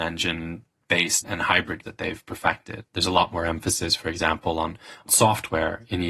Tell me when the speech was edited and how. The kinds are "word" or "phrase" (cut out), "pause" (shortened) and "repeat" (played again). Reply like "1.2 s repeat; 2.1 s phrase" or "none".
1.2 s word; 1.8 s word